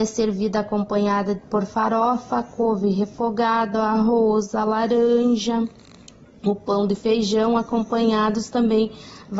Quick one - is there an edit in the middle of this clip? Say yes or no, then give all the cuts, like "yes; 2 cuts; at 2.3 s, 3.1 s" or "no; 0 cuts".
no; 0 cuts